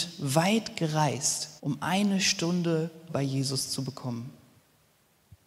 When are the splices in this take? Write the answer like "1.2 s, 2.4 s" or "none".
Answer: 1.6 s, 3.1 s